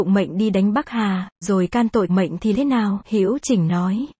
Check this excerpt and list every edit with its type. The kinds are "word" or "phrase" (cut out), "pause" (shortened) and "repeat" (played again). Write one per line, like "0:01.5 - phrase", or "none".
0:01.4 - word
0:02.1 - word
0:02.5 - word